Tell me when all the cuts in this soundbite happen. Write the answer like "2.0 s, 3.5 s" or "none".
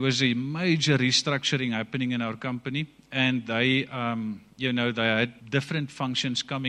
4.5 s, 5.4 s